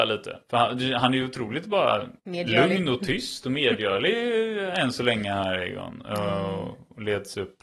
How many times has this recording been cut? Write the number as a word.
one